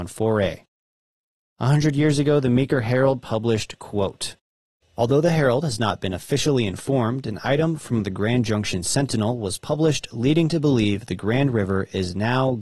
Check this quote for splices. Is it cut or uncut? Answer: uncut